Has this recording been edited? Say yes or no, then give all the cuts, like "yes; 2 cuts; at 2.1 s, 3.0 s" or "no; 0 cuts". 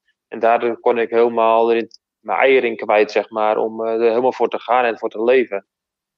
no; 0 cuts